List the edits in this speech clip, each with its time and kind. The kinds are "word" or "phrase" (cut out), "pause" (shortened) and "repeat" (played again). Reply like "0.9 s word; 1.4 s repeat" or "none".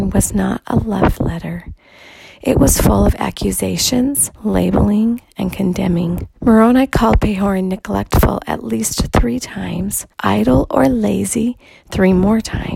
1.1 s word; 4.3 s pause; 6.4 s pause; 10.1 s pause